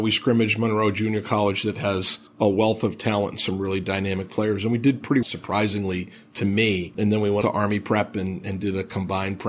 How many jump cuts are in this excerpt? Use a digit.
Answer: 3